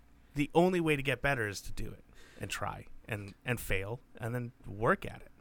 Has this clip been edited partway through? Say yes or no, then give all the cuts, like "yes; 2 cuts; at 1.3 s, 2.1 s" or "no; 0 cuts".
no; 0 cuts